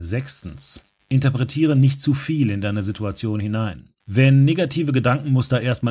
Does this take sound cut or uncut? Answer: cut